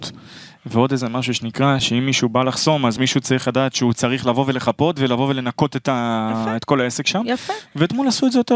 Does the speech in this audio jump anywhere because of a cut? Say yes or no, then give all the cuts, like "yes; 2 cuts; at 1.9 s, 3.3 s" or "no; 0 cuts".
no; 0 cuts